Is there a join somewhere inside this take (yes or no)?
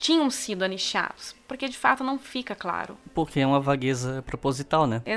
no